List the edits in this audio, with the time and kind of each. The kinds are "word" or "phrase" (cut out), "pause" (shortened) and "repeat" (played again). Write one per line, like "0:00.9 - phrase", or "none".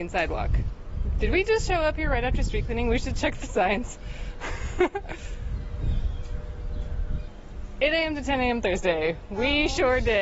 none